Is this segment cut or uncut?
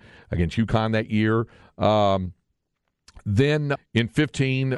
cut